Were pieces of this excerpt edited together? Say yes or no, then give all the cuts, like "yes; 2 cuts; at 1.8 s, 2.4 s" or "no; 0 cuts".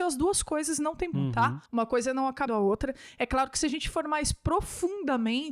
yes; 3 cuts; at 1.1 s, 1.7 s, 2.5 s